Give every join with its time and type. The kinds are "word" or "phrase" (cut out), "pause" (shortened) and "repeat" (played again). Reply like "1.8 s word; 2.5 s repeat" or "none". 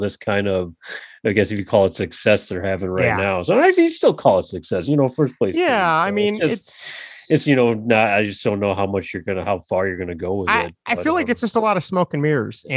7.4 s word